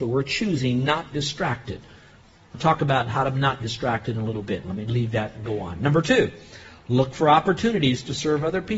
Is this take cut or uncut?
cut